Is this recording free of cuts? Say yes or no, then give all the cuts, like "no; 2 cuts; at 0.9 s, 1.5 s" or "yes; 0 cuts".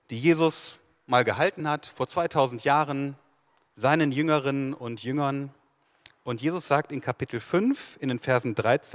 yes; 0 cuts